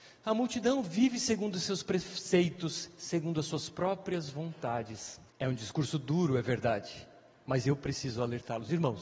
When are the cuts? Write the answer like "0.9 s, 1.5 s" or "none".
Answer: 5.3 s